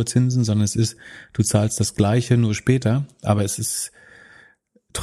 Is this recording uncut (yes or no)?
yes